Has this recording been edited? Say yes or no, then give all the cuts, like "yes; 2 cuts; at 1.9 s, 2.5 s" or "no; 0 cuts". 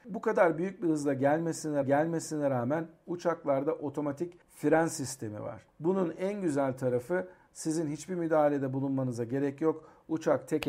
yes; 3 cuts; at 1.8 s, 4.4 s, 5.7 s